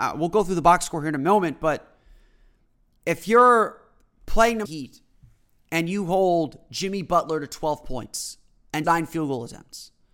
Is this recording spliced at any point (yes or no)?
yes